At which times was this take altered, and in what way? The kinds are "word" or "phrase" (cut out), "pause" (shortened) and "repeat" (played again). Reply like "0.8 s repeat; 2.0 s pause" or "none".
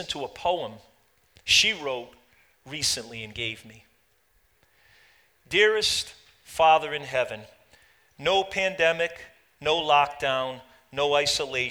none